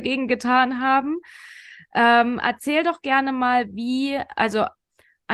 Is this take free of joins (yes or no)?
yes